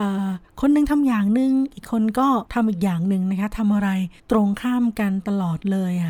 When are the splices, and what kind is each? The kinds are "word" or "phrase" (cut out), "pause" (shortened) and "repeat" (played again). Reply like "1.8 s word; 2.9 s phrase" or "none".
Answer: 2.5 s pause; 4.2 s pause